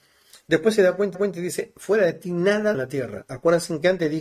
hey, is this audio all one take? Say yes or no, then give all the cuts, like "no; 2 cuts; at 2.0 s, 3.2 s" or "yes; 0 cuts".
no; 2 cuts; at 1.1 s, 2.7 s